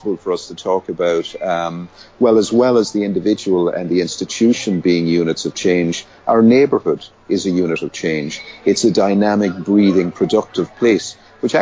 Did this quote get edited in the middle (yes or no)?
no